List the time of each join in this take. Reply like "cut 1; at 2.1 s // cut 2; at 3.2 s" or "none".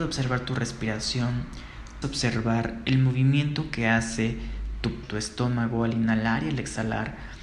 cut 1; at 2.0 s // cut 2; at 5.0 s